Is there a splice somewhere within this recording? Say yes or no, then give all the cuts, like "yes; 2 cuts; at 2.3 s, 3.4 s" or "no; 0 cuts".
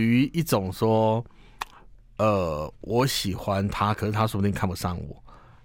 no; 0 cuts